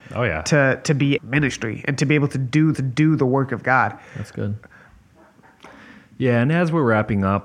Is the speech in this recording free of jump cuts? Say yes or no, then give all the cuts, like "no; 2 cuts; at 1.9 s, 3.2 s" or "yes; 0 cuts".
no; 2 cuts; at 1.2 s, 2.7 s